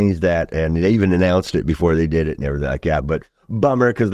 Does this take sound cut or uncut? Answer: uncut